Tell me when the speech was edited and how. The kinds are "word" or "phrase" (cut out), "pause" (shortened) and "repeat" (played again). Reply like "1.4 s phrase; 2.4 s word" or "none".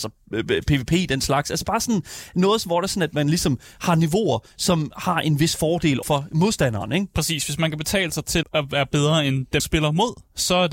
6.0 s word; 8.4 s word; 9.6 s word